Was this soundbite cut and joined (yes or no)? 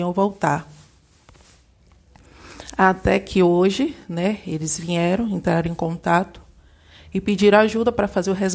no